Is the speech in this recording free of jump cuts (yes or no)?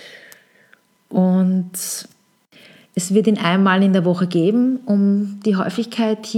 yes